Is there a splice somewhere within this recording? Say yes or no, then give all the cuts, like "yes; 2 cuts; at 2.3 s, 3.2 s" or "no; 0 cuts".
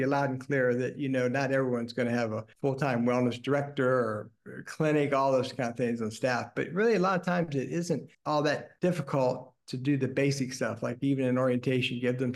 yes; 1 cut; at 2.5 s